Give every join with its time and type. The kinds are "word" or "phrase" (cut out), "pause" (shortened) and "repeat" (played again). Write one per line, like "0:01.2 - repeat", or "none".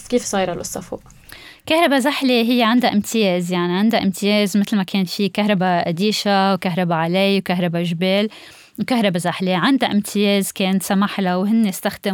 none